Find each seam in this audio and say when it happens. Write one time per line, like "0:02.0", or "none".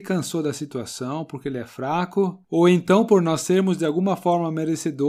0:02.4